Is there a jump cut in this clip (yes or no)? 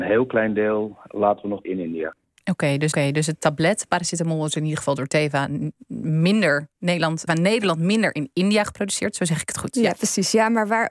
yes